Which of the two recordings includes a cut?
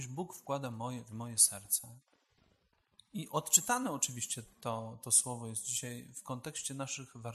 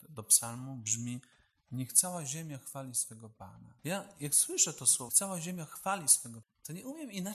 second; 3 cuts; at 3.8 s, 5.1 s, 6.4 s

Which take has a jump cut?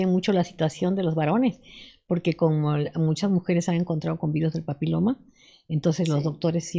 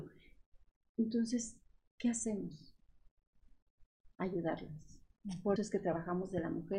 second; 1 cut; at 5.6 s

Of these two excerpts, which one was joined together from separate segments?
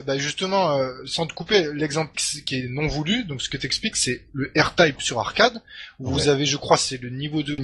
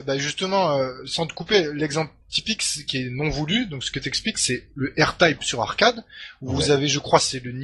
first; 1 cut; at 2.1 s

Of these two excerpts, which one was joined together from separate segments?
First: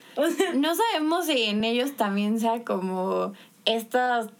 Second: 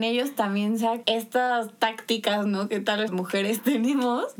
second; 2 cuts; at 1.0 s, 3.1 s

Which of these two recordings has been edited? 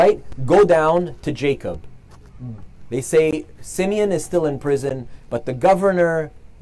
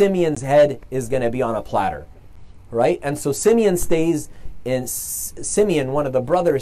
first; 1 cut; at 3.6 s

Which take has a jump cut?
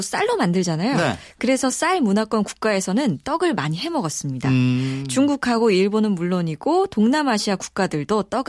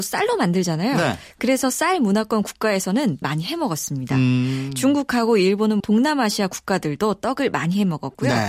second; 2 cuts; at 3.2 s, 5.8 s

